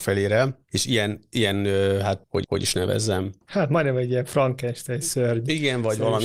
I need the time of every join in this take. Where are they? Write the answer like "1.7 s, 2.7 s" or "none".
2.4 s, 3.4 s